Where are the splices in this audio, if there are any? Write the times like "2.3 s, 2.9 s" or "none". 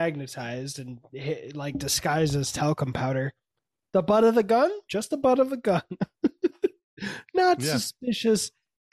none